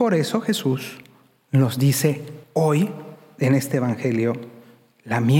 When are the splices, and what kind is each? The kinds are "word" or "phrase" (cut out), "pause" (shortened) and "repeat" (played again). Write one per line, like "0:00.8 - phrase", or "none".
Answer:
0:02.4 - pause